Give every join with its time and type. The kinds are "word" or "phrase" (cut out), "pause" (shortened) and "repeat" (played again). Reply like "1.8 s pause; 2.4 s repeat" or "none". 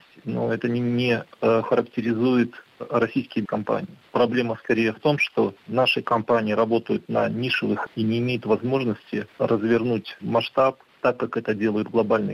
2.7 s phrase; 3.5 s word; 7.9 s word; 9.3 s pause

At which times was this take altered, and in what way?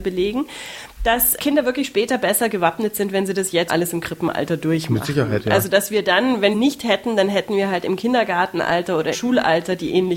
1.4 s word; 3.7 s word; 6.5 s phrase; 9.1 s word

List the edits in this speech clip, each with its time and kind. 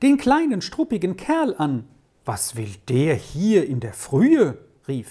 none

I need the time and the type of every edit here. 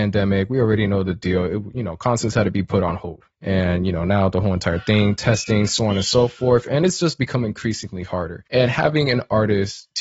3.3 s pause; 8.5 s pause

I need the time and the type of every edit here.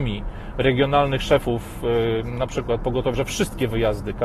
3.1 s word

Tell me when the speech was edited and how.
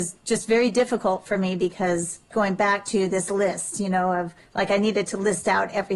2.3 s phrase

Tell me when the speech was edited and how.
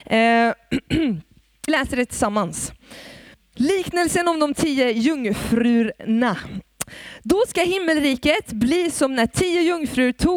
1.7 s word; 3.3 s pause

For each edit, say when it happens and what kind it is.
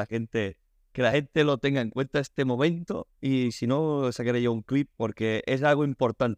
none

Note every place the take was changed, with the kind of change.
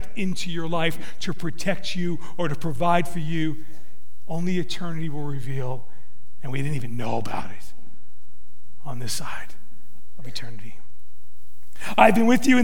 none

